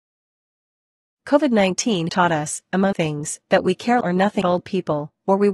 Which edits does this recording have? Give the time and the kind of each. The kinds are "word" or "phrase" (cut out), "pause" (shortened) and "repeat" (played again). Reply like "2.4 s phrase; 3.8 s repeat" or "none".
2.1 s word; 2.9 s word; 4.0 s word; 4.4 s word